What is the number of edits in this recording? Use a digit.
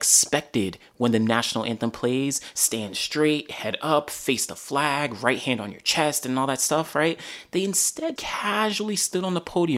1